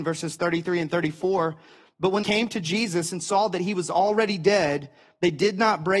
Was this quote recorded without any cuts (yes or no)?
no